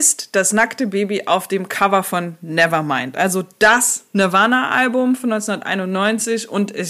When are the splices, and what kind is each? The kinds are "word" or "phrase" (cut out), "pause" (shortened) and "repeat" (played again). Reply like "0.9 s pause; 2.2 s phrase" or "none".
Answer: none